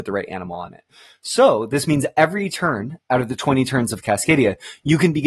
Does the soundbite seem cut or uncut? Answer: uncut